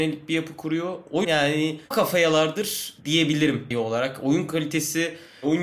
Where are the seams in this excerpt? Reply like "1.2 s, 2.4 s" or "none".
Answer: 1.2 s, 1.9 s, 3.7 s